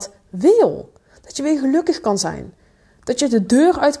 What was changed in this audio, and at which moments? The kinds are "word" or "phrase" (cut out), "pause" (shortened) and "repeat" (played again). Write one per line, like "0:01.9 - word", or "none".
none